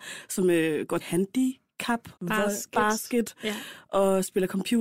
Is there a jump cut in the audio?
yes; 2 cuts; at 1.0 s, 2.2 s

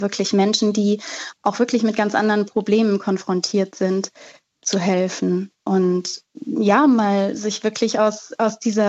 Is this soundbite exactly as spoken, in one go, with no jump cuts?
yes; 0 cuts

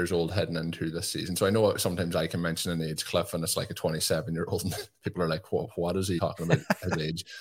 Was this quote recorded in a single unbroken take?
no; 1 cut; at 6.2 s

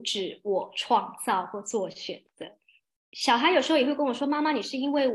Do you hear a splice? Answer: no; 0 cuts

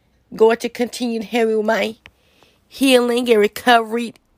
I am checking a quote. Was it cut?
no; 0 cuts

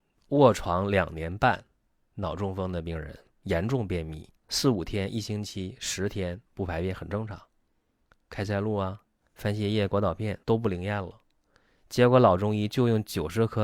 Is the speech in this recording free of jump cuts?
no; 4 cuts; at 4.4 s, 6.5 s, 9.2 s, 10.4 s

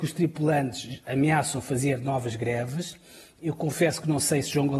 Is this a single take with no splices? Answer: yes; 0 cuts

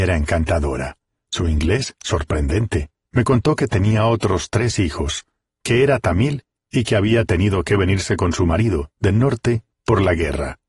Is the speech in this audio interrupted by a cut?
no; 0 cuts

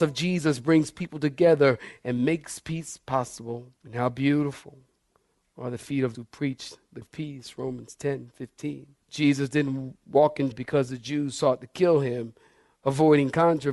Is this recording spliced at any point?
yes; 5 cuts; at 3.8 s, 6.1 s, 7.0 s, 9.0 s, 10.5 s

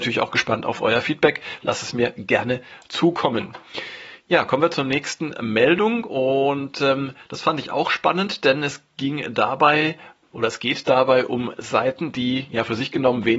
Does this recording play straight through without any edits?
yes; 0 cuts

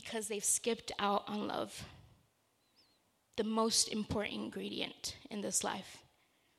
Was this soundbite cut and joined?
no; 0 cuts

